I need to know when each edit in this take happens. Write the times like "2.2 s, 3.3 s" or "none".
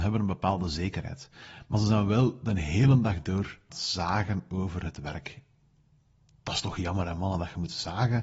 3.7 s